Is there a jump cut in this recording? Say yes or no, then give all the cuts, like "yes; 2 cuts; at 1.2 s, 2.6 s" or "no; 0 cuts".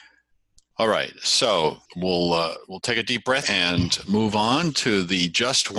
yes; 2 cuts; at 1.9 s, 3.4 s